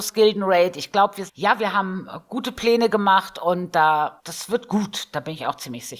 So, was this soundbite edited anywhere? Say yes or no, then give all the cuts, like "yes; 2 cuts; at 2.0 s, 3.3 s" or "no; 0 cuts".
yes; 2 cuts; at 1.3 s, 4.2 s